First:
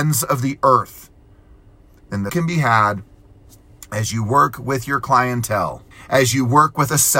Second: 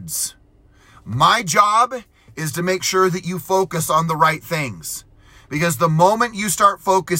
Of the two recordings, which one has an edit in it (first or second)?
first